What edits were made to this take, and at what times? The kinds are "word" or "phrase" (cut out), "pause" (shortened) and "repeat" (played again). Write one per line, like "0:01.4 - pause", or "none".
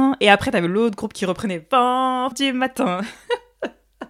0:02.3 - phrase